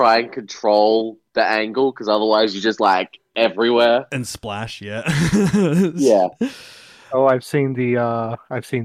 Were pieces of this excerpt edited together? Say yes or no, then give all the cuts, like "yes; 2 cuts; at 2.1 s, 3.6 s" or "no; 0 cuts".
no; 0 cuts